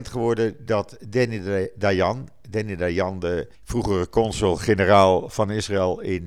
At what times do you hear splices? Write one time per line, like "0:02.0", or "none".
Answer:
0:03.5